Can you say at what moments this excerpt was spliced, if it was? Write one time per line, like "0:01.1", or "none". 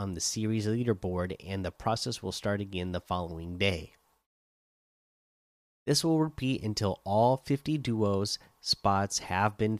none